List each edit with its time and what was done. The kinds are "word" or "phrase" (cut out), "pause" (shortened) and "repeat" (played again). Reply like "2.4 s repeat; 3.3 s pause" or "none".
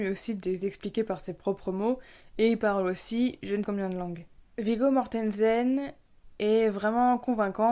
3.6 s word